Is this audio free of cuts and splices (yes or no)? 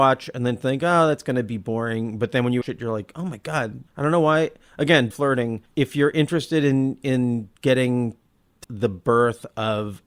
no